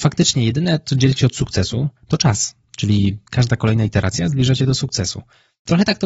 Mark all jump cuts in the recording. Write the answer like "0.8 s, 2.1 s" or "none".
2.0 s, 3.3 s